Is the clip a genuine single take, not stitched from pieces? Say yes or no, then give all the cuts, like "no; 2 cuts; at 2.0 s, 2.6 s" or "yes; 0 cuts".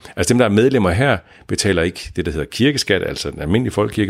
yes; 0 cuts